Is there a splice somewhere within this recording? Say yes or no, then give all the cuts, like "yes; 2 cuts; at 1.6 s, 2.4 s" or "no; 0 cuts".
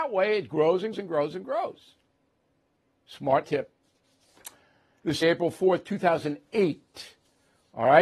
yes; 3 cuts; at 0.9 s, 3.4 s, 5.2 s